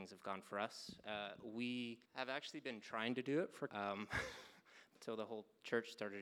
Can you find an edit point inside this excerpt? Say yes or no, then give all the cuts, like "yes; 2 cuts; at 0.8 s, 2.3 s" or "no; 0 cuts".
yes; 3 cuts; at 2.0 s, 3.7 s, 4.9 s